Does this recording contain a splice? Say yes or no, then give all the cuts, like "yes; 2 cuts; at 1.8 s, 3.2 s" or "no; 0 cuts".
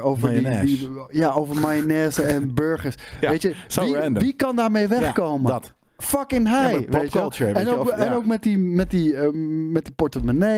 no; 0 cuts